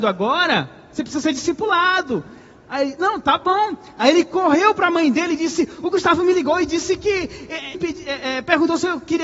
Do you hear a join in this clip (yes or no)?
yes